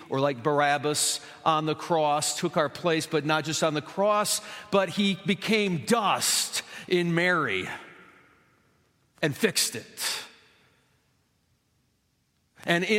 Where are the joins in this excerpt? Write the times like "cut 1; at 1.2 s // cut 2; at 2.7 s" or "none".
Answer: none